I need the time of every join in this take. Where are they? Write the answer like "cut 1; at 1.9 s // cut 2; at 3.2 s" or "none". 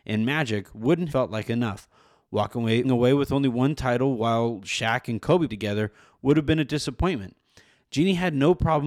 cut 1; at 1.1 s // cut 2; at 2.8 s // cut 3; at 5.5 s